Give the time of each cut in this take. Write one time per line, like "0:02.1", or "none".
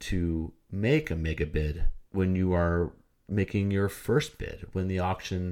0:02.1